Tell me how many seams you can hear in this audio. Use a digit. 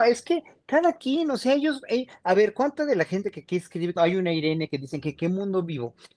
1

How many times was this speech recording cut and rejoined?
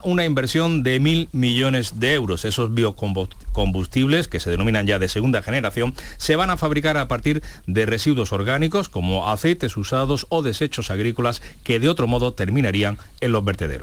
0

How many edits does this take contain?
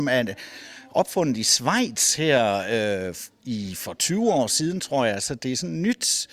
0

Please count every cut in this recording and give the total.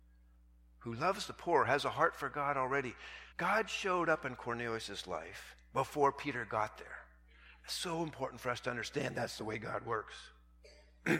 1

